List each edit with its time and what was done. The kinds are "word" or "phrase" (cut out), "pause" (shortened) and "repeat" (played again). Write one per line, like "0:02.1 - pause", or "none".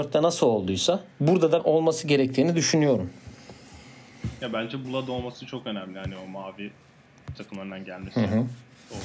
0:01.1 - pause
0:01.6 - word
0:04.8 - word
0:07.4 - phrase